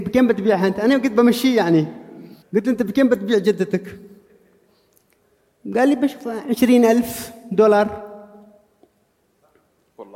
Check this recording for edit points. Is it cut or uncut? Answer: cut